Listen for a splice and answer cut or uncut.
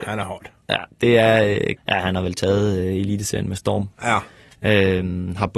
cut